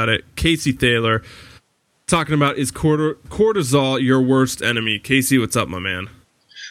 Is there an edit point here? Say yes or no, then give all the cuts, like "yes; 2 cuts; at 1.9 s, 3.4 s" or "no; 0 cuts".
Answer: no; 0 cuts